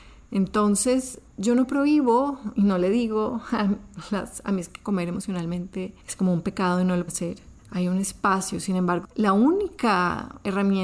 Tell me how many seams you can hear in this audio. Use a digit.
6